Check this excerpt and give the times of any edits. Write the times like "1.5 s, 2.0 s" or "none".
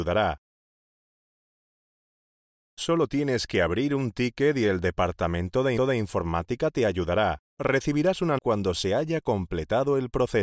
5.8 s, 7.5 s, 8.4 s